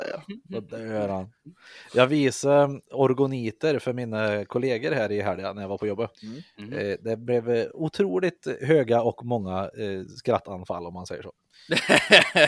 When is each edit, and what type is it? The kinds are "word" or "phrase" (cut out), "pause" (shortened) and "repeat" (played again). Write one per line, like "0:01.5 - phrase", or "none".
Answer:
0:06.1 - pause

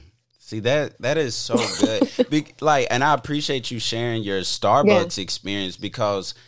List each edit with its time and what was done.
none

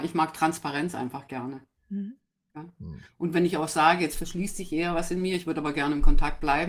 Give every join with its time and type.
none

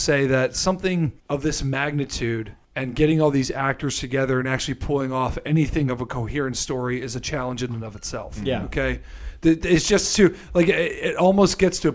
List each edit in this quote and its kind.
0:01.2 - pause
0:02.6 - pause

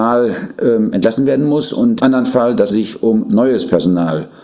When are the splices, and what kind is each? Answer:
0:02.0 - word
0:02.7 - word

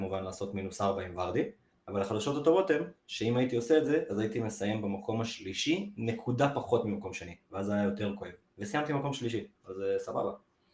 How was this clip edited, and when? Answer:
0:01.7 - pause
0:08.5 - pause

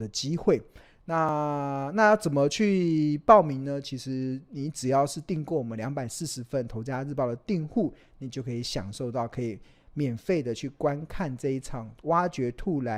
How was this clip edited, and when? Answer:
none

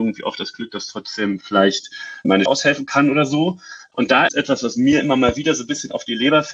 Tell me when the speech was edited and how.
0:02.5 - word
0:04.3 - word

